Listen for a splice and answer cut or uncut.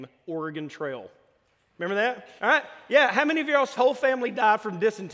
cut